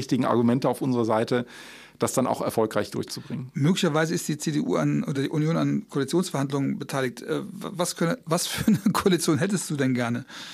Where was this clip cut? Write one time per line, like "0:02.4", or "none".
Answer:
none